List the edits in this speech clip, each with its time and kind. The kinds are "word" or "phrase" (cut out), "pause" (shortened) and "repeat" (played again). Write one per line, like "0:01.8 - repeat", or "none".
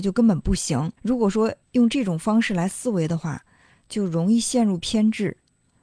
0:01.0 - pause
0:01.6 - pause